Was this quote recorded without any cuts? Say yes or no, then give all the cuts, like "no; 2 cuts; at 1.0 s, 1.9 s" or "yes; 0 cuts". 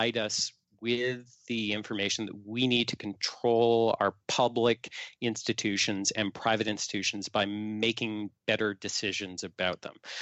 yes; 0 cuts